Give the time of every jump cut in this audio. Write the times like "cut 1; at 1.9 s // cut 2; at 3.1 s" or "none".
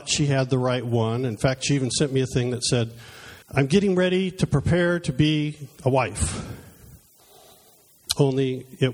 cut 1; at 3.4 s